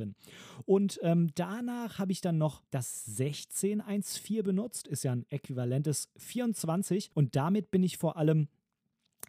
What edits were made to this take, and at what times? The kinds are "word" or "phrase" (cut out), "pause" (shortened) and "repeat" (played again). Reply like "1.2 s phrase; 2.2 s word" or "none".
2.7 s pause; 7.1 s pause